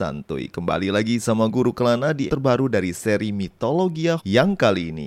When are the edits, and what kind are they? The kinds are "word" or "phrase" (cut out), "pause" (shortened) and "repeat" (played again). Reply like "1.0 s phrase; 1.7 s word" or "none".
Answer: 1.5 s word; 2.3 s word; 4.2 s word